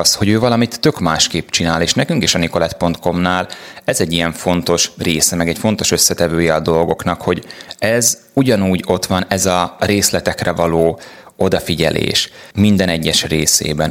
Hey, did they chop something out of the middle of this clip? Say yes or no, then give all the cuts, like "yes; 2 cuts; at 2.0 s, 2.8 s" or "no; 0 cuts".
yes; 1 cut; at 12.5 s